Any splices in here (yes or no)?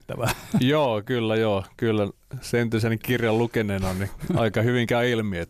no